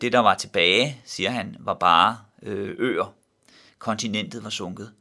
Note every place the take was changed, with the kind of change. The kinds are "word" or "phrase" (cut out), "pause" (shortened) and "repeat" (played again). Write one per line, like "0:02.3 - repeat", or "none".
none